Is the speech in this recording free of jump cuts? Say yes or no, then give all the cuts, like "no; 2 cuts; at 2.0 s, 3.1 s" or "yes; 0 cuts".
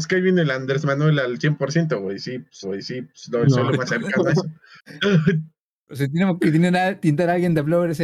no; 1 cut; at 2.6 s